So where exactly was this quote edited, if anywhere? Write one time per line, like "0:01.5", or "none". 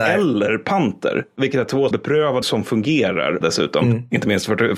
0:01.9
0:02.4
0:03.4